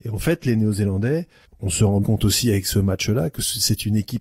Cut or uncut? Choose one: cut